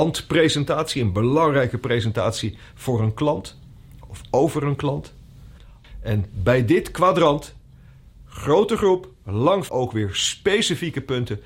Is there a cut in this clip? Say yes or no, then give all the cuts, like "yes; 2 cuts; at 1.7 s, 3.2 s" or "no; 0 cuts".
yes; 1 cut; at 9.7 s